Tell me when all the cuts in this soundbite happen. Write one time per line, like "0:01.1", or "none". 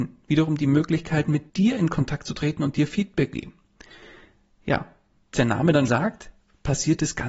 0:01.5
0:03.3
0:05.3
0:05.9

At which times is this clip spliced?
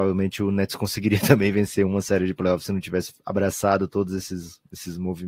none

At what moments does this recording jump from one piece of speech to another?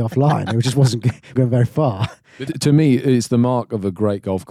0:01.3
0:02.5

